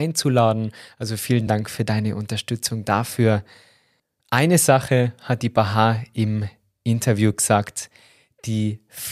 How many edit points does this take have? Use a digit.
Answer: 0